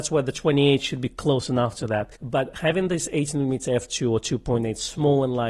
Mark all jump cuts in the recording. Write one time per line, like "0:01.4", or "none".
0:02.2